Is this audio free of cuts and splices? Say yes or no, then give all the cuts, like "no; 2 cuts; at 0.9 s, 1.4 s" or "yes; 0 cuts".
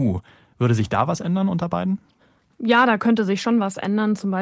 yes; 0 cuts